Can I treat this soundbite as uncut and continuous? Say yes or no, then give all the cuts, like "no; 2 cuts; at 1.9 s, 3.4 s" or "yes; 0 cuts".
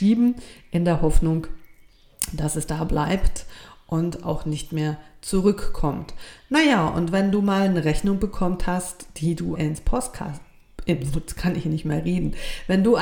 no; 1 cut; at 9.5 s